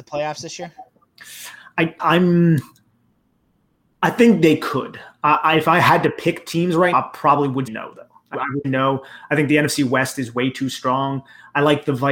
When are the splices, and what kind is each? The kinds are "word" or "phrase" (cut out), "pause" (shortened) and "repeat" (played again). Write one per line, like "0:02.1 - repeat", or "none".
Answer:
0:02.0 - word
0:06.9 - word
0:07.7 - word
0:08.3 - word
0:08.6 - word